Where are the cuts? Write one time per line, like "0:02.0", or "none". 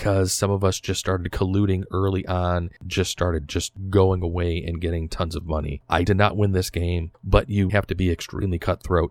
0:06.0
0:07.7